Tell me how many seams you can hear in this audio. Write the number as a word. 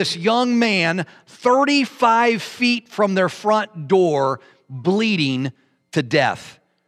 zero